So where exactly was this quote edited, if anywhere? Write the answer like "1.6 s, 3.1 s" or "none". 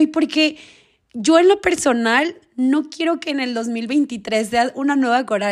none